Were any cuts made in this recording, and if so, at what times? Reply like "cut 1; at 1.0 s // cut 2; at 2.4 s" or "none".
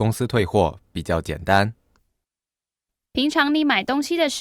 none

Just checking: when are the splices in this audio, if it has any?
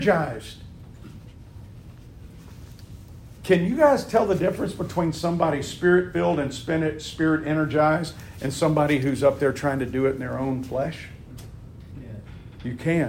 none

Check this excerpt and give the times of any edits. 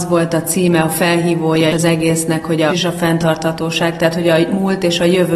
cut 1; at 1.7 s // cut 2; at 2.7 s

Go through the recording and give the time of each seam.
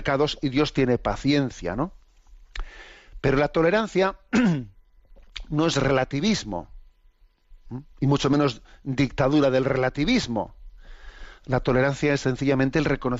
none

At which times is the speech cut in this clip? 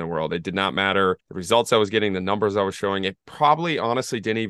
cut 1; at 1.2 s

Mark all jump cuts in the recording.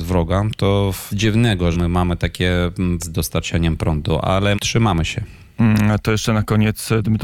cut 1; at 1.1 s // cut 2; at 1.7 s // cut 3; at 3.0 s // cut 4; at 4.5 s

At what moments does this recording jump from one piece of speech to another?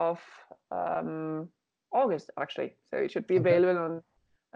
none

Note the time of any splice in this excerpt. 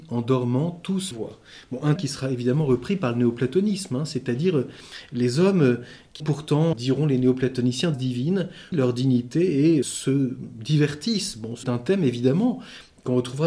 cut 1; at 1.1 s // cut 2; at 2.0 s // cut 3; at 6.2 s // cut 4; at 6.7 s // cut 5; at 7.9 s // cut 6; at 8.7 s // cut 7; at 9.8 s // cut 8; at 11.6 s

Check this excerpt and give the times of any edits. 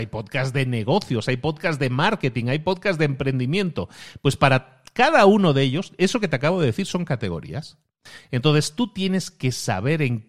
none

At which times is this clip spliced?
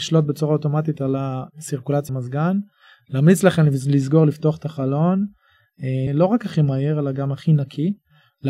cut 1; at 2.1 s // cut 2; at 6.1 s

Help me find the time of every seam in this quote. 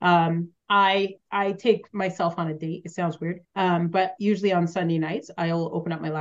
cut 1; at 1.2 s // cut 2; at 3.4 s

